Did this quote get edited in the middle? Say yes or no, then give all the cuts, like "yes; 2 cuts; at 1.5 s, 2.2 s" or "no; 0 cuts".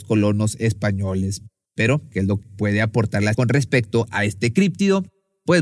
yes; 2 cuts; at 2.4 s, 3.3 s